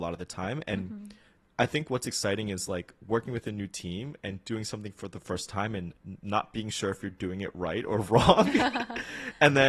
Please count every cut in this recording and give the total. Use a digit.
0